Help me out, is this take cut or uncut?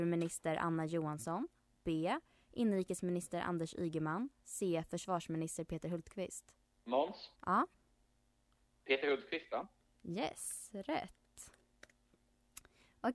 cut